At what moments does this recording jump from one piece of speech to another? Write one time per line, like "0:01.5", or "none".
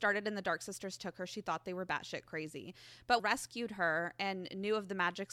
0:03.2